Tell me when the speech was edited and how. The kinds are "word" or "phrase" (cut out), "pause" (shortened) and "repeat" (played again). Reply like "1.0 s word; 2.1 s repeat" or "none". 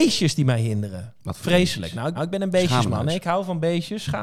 1.2 s pause; 2.2 s repeat